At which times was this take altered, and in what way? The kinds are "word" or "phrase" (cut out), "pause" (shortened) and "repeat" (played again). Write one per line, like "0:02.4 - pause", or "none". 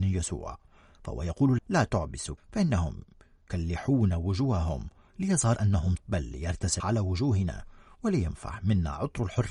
0:01.6 - word
0:02.4 - word
0:05.6 - word
0:06.0 - word
0:06.8 - word